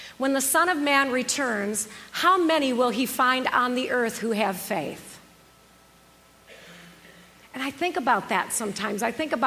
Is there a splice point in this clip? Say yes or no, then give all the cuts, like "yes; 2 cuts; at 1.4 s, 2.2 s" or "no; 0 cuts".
no; 0 cuts